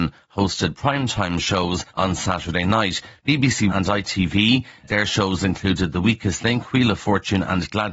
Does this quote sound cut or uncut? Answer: cut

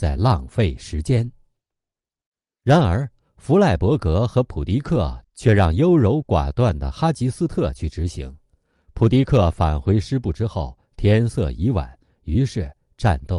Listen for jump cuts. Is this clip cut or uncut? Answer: uncut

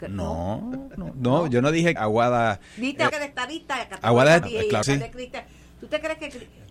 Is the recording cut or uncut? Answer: cut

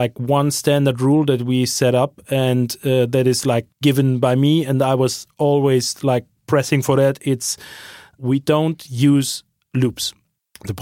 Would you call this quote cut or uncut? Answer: cut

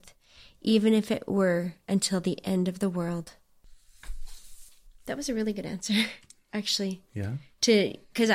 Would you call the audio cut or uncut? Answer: uncut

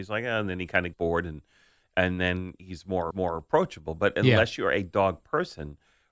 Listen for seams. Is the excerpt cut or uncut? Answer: cut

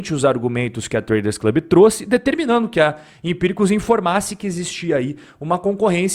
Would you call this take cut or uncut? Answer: uncut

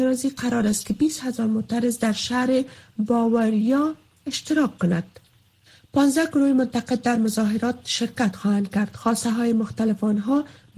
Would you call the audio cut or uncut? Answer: uncut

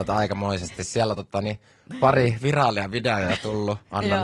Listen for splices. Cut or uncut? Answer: uncut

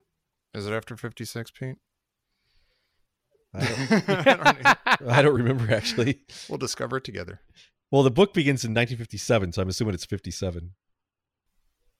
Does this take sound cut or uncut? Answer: uncut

